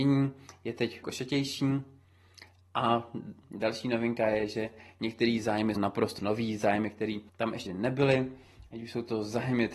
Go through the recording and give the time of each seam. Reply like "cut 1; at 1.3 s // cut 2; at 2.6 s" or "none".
cut 1; at 1.0 s // cut 2; at 3.4 s // cut 3; at 5.8 s // cut 4; at 6.2 s // cut 5; at 7.3 s // cut 6; at 7.7 s